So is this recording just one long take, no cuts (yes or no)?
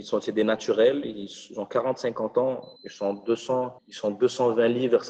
no